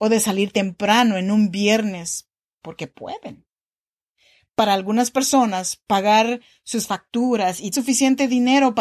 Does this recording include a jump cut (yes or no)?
yes